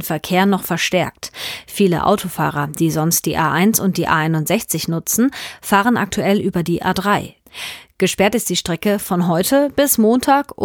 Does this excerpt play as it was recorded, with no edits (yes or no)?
yes